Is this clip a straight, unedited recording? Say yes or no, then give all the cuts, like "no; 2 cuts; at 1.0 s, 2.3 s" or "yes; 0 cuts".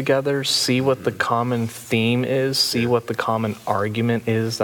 yes; 0 cuts